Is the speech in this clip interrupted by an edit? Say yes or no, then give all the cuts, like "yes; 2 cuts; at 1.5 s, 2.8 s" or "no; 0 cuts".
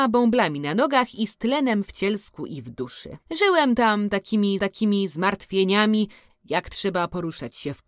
yes; 2 cuts; at 3.3 s, 4.6 s